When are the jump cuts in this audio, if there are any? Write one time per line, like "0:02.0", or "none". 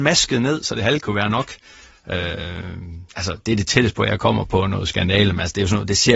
0:03.1

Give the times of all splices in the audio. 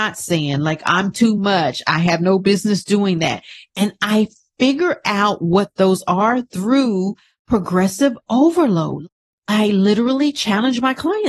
none

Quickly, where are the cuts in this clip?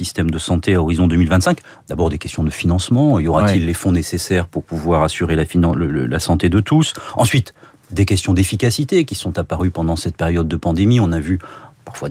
none

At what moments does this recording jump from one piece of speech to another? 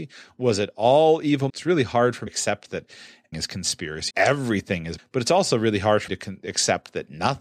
0:01.5
0:02.3
0:03.3
0:04.1
0:05.0
0:06.1

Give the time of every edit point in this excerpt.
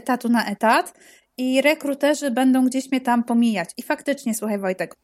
none

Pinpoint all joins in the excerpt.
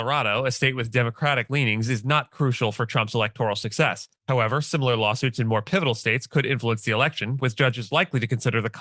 0:04.2

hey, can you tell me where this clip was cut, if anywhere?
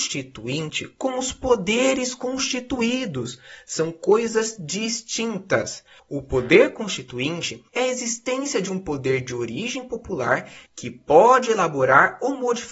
0:06.0
0:07.7
0:10.7

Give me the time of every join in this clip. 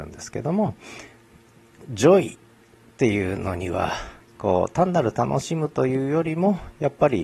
0:04.2

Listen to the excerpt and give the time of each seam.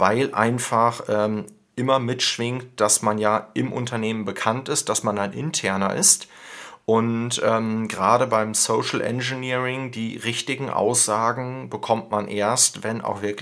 none

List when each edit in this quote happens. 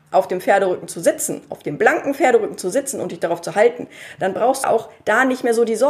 0:04.6

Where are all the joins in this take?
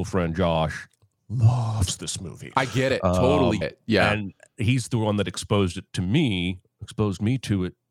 0:03.6

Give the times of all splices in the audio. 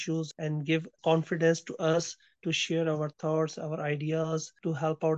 none

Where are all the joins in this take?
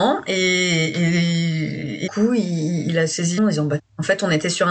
0:02.1
0:03.4
0:03.8

